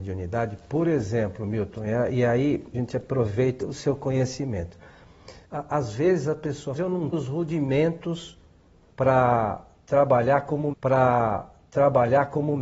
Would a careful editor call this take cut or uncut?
cut